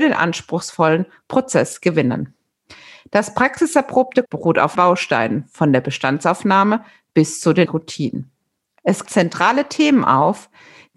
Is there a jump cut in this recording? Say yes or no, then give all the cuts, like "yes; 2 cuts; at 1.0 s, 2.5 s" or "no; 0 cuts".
yes; 4 cuts; at 4.2 s, 4.7 s, 7.6 s, 9.0 s